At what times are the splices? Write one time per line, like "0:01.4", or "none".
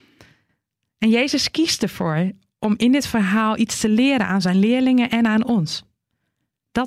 none